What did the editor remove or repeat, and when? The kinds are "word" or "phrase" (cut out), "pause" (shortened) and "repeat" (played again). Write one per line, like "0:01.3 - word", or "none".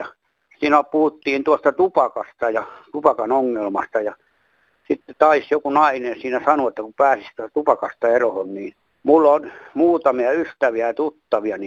none